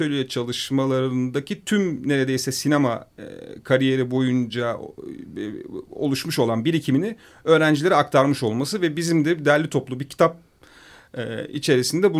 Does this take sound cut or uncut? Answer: uncut